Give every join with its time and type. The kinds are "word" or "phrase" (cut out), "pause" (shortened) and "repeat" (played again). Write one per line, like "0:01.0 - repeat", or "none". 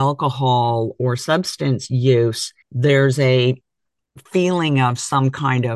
0:02.6 - pause
0:04.3 - pause